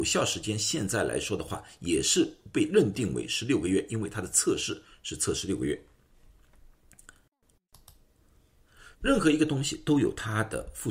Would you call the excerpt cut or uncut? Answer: cut